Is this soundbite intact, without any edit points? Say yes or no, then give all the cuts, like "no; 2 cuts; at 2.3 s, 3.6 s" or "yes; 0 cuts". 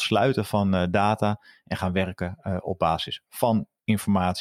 yes; 0 cuts